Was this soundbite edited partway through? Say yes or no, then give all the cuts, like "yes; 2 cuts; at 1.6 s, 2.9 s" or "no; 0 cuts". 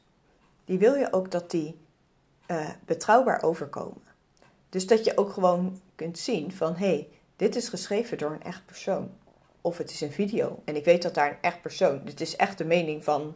no; 0 cuts